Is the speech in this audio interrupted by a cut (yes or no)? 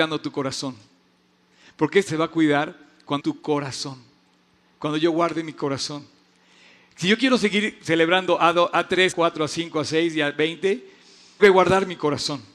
yes